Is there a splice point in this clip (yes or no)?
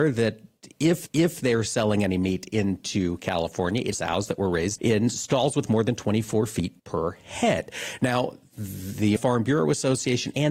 yes